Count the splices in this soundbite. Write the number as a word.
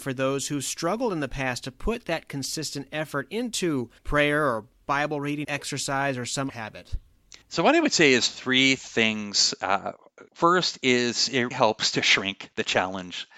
six